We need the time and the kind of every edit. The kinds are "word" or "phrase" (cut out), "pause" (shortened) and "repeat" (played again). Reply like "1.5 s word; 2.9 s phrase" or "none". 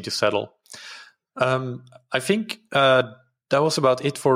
none